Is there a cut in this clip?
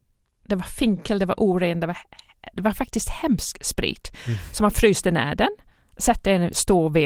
no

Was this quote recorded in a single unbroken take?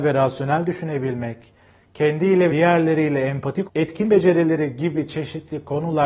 no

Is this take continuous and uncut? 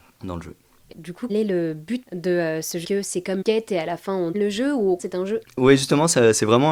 no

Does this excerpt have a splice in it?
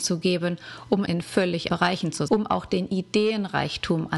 yes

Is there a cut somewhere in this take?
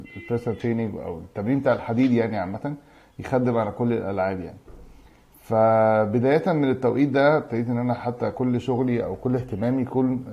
no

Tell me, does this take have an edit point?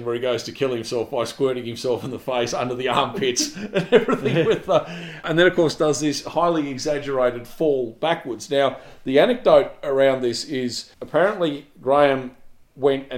yes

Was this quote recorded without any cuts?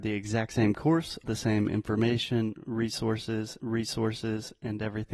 no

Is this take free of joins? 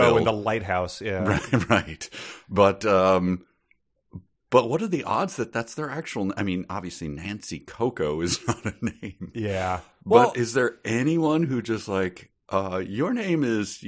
yes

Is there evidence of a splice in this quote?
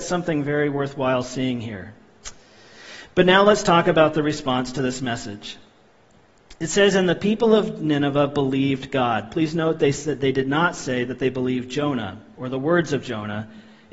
no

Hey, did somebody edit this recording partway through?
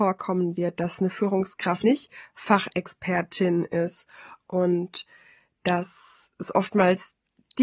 yes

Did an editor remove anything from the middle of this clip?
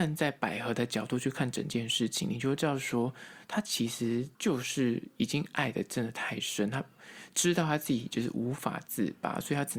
yes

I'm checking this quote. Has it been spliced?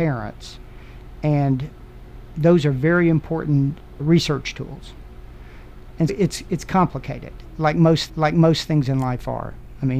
yes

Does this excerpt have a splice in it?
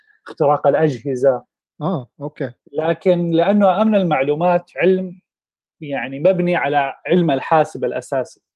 no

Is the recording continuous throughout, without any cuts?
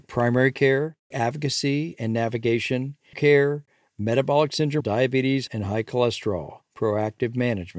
no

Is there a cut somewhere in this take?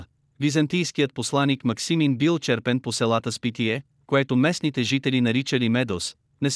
no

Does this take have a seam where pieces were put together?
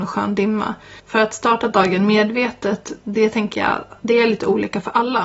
yes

